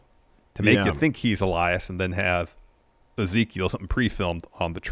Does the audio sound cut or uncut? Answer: uncut